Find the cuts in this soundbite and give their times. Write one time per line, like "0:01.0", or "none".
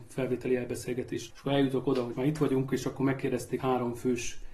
0:01.3
0:02.1
0:03.6

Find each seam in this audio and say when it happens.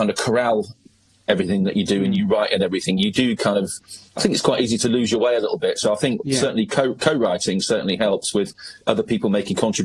0:04.1
0:08.8

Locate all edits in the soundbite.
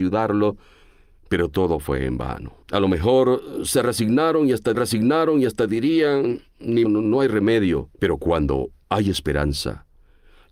0:02.6
0:04.7
0:06.8
0:07.9

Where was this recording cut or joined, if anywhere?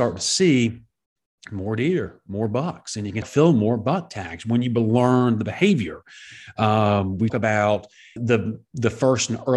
0:03.2
0:07.3
0:08.2

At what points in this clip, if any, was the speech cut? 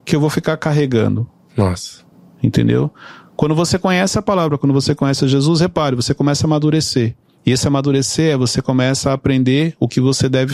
0:02.1

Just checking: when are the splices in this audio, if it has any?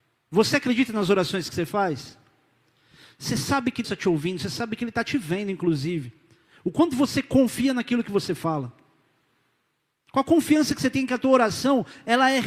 0:03.8

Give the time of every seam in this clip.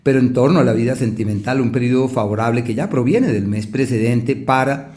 none

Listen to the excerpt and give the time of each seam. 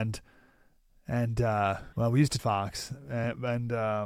0:01.9
0:02.4

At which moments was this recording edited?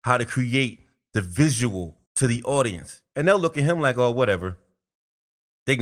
0:02.1

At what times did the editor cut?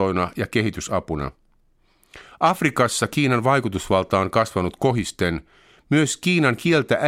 none

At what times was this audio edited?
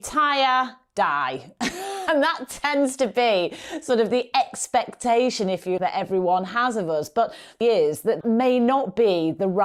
0:05.8
0:07.6
0:08.2

